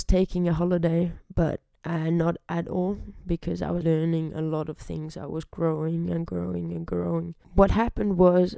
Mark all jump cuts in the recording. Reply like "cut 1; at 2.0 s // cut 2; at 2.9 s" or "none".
cut 1; at 3.8 s // cut 2; at 7.4 s